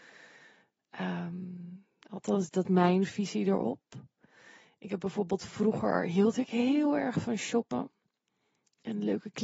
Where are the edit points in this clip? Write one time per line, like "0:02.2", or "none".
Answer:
0:02.0
0:02.6